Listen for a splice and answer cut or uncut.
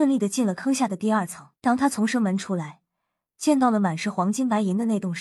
cut